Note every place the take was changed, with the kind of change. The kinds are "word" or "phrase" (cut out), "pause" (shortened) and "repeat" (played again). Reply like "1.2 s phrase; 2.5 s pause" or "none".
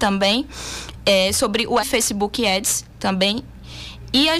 1.8 s word